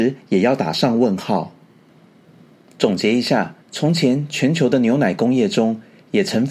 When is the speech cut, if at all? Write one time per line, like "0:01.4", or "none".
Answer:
0:03.6

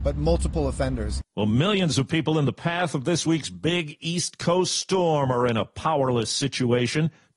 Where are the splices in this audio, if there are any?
none

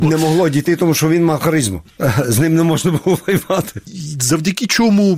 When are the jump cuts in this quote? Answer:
none

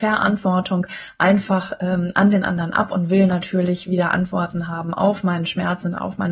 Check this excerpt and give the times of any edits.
none

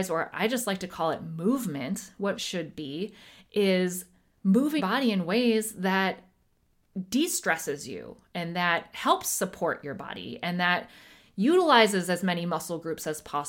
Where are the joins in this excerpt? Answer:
0:02.3
0:04.8

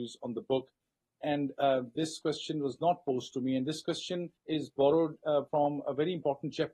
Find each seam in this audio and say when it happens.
0:04.4
0:05.5

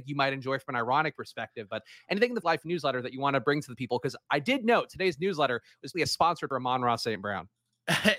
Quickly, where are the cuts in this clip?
0:02.4
0:05.9
0:06.5

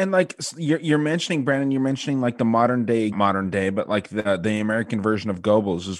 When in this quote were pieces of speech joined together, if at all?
0:03.1

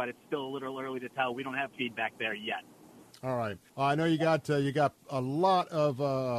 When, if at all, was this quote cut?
0:01.7
0:03.1
0:03.7

